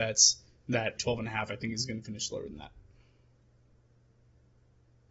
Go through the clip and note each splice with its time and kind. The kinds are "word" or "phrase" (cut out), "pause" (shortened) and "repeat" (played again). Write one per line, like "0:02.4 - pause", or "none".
0:01.0 - word